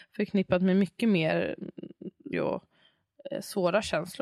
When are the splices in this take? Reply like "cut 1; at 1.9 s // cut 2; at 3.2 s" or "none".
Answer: cut 1; at 2.3 s